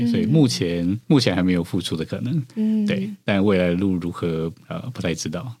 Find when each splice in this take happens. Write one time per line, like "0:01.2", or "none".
0:01.0